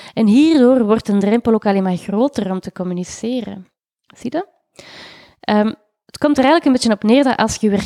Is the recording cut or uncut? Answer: uncut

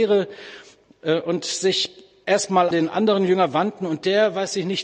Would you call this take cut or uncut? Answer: cut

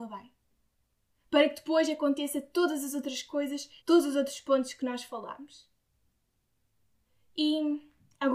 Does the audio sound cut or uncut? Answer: cut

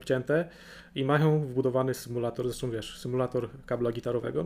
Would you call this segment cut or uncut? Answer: uncut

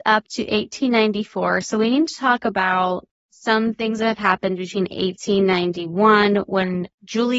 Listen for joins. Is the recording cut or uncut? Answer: uncut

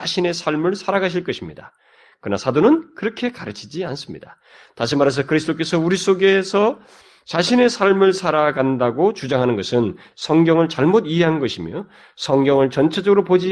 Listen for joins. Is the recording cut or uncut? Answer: uncut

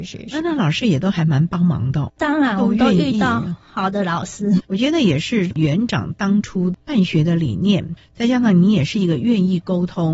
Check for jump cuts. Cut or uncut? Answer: cut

